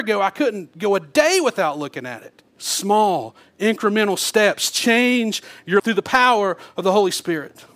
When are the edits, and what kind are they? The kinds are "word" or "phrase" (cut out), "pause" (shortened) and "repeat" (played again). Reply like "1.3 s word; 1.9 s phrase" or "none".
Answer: 2.5 s pause; 5.8 s word